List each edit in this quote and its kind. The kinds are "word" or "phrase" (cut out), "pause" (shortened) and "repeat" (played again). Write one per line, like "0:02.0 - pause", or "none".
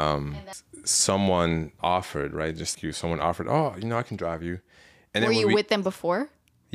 0:01.8 - word
0:02.7 - word